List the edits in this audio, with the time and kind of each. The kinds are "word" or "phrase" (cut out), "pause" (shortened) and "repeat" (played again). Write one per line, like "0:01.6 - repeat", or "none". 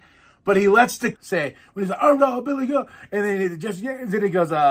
0:01.1 - word
0:02.2 - word